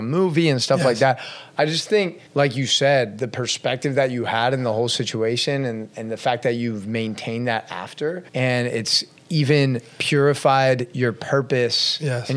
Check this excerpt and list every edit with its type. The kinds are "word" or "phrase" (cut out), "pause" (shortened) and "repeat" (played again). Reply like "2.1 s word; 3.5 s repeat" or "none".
2.3 s pause; 8.3 s pause